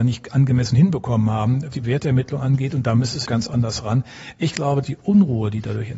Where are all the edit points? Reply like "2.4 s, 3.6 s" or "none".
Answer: 1.7 s, 3.3 s, 4.8 s